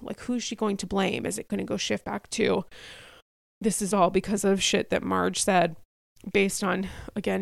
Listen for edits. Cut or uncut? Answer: uncut